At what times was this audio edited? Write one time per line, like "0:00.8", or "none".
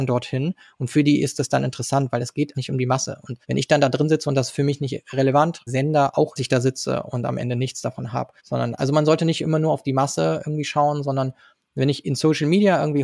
0:02.5
0:03.4
0:05.7
0:06.4
0:08.4